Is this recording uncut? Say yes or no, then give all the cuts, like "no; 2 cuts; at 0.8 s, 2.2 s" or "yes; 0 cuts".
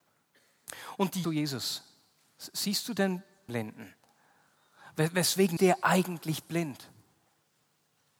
no; 3 cuts; at 1.2 s, 3.5 s, 5.6 s